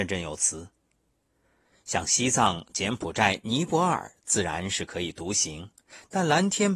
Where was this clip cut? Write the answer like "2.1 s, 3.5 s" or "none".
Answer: none